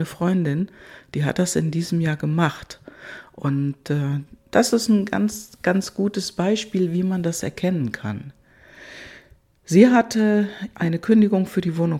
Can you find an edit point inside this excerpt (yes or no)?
no